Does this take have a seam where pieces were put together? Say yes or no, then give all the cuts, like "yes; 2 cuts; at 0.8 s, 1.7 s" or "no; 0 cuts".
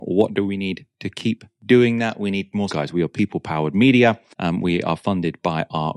yes; 2 cuts; at 2.7 s, 4.3 s